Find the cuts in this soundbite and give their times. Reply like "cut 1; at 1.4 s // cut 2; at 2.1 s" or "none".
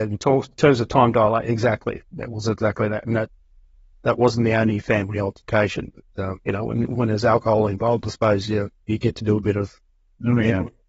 none